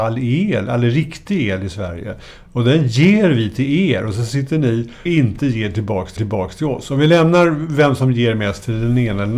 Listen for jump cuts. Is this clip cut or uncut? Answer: cut